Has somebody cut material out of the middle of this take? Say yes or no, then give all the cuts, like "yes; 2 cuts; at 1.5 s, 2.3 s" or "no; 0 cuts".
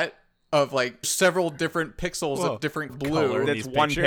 yes; 2 cuts; at 1.0 s, 2.9 s